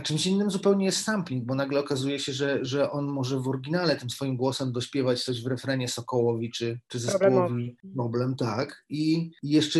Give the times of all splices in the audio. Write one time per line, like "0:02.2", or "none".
none